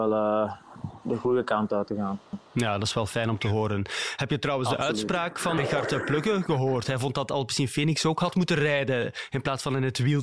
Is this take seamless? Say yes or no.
no